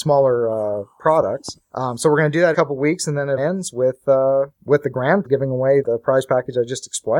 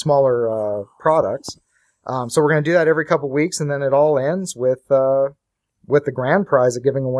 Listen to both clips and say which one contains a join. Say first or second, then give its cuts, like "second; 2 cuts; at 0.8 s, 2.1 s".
first; 6 cuts; at 1.6 s, 2.5 s, 3.4 s, 4.5 s, 5.2 s, 5.8 s